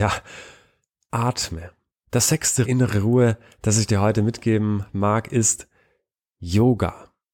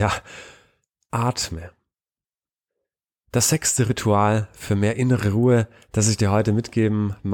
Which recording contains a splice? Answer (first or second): first